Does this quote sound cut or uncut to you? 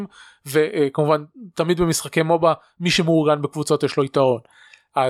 uncut